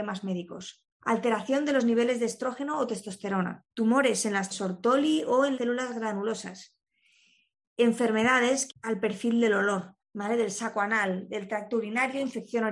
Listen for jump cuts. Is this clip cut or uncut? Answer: cut